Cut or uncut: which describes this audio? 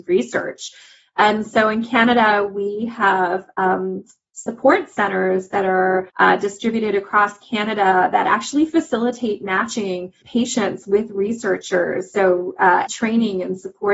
cut